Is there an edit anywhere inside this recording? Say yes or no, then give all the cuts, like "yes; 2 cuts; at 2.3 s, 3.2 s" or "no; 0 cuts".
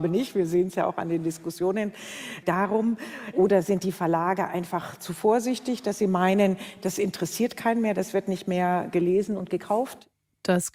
no; 0 cuts